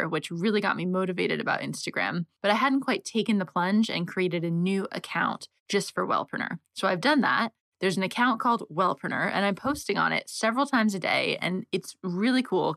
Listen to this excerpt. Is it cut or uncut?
uncut